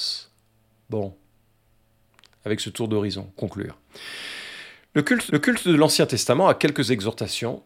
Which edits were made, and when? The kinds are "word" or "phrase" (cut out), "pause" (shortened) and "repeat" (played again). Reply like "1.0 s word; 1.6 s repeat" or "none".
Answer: 3.4 s word; 5.3 s repeat